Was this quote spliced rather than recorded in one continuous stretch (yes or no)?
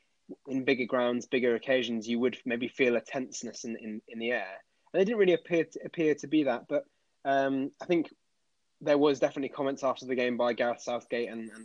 no